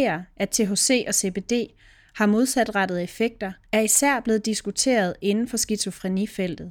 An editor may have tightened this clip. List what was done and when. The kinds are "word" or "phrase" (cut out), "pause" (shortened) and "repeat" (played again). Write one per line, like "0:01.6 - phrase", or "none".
0:03.6 - pause